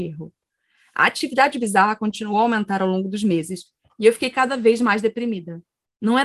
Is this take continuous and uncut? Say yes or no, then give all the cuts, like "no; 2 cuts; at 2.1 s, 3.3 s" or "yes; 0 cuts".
yes; 0 cuts